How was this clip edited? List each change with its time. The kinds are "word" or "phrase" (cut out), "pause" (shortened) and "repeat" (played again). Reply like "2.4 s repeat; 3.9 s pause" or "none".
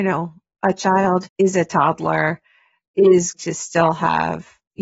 1.2 s word; 3.3 s word